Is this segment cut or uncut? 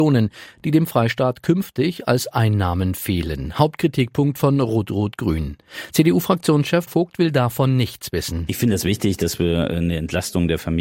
cut